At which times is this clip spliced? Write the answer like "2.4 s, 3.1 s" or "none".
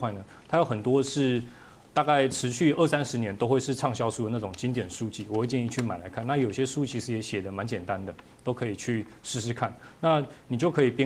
none